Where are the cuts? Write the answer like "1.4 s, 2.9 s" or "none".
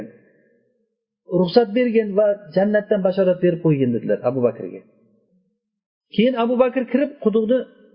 none